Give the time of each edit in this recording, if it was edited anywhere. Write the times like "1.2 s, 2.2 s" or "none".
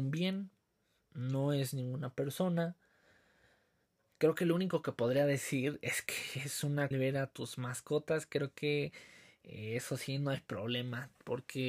6.9 s